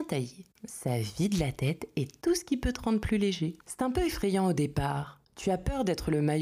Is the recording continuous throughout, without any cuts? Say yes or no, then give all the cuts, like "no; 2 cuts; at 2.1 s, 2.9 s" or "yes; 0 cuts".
no; 1 cut; at 3.6 s